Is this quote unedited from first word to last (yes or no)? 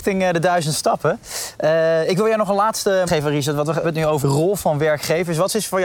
no